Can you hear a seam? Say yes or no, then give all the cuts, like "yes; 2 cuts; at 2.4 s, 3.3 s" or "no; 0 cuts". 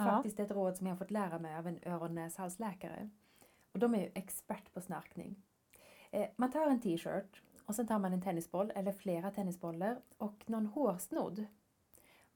no; 0 cuts